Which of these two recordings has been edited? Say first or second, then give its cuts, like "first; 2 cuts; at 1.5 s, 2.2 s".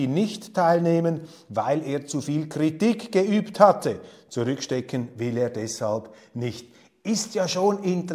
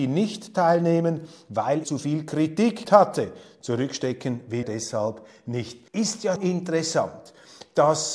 second; 5 cuts; at 1.8 s, 2.8 s, 4.6 s, 5.9 s, 6.4 s